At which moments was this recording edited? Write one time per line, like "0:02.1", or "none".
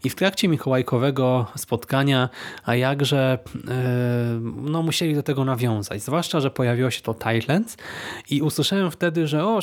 none